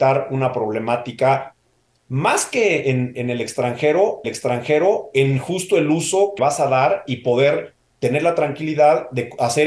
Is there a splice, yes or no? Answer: yes